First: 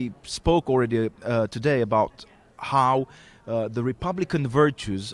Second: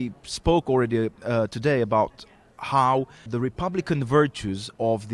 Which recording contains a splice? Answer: second; 1 cut; at 3.3 s

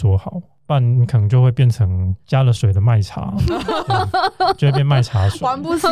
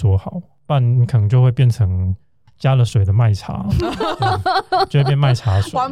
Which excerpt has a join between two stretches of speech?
first; 1 cut; at 2.2 s

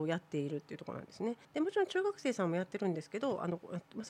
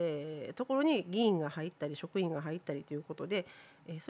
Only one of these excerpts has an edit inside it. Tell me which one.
first; 1 cut; at 1.4 s

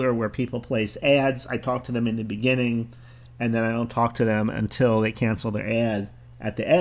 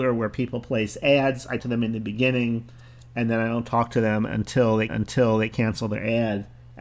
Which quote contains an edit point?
second; 2 cuts; at 1.6 s, 4.9 s

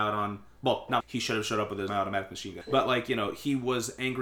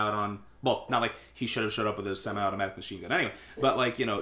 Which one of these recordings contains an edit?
first; 3 cuts; at 1.0 s, 1.9 s, 2.6 s

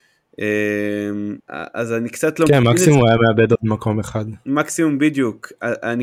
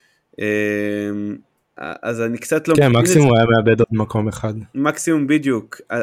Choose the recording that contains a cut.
first; 1 cut; at 1.4 s

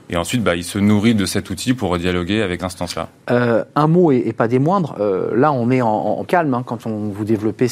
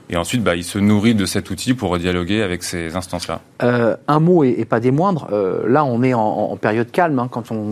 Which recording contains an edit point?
first; 2 cuts; at 2.6 s, 6.3 s

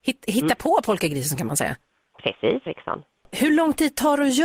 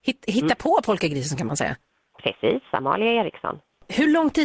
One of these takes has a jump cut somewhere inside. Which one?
first; 1 cut; at 2.7 s

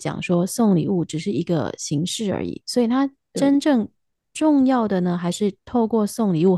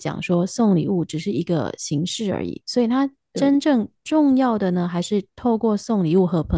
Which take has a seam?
second; 1 cut; at 4.0 s

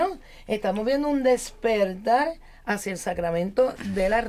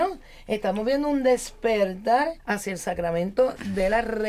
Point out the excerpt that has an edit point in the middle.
second; 1 cut; at 2.4 s

